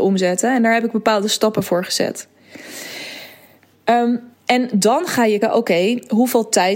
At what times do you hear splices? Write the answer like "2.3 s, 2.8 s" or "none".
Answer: 4.3 s, 5.4 s